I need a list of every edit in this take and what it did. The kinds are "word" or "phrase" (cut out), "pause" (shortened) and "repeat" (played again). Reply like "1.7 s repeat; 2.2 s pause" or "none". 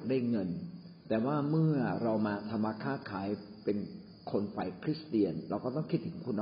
1.0 s pause